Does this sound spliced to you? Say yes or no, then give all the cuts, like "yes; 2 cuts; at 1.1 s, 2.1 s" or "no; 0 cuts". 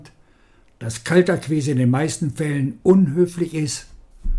no; 0 cuts